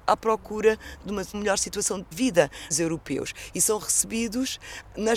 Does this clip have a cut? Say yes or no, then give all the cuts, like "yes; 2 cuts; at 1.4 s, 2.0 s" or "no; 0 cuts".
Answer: yes; 4 cuts; at 1.0 s, 1.3 s, 2.1 s, 2.7 s